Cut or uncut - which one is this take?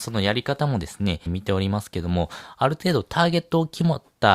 cut